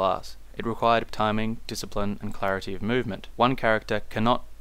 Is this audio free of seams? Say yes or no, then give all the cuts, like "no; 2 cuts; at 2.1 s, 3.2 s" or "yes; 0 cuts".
no; 1 cut; at 1.1 s